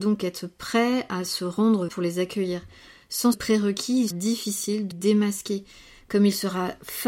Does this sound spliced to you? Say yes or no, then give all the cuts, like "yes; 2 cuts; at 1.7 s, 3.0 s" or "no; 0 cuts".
yes; 4 cuts; at 1.9 s, 3.3 s, 4.1 s, 4.9 s